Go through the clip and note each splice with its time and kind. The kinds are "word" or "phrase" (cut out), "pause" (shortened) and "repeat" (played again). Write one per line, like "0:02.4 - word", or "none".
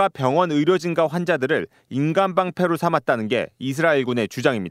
none